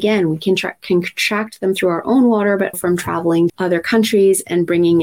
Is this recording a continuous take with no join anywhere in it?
no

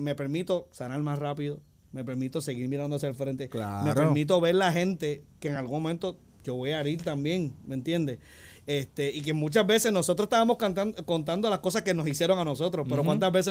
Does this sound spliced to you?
no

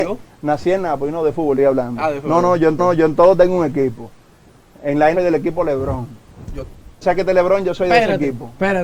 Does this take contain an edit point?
yes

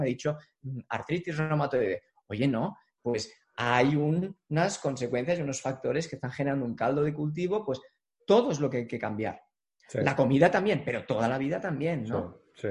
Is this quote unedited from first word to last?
yes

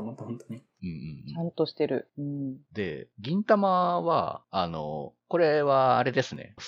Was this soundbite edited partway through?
no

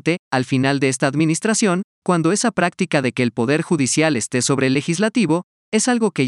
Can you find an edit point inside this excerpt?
no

